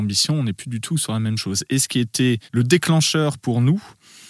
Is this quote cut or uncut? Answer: cut